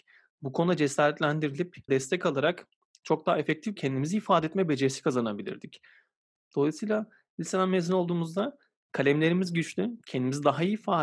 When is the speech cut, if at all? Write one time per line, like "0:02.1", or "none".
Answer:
0:01.9
0:03.8